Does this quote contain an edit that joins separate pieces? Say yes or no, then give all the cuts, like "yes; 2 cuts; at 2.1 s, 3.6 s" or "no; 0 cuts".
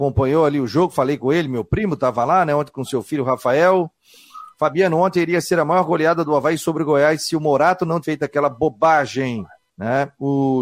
yes; 2 cuts; at 8.0 s, 9.6 s